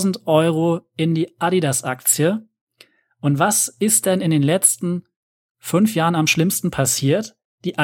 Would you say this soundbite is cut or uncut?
uncut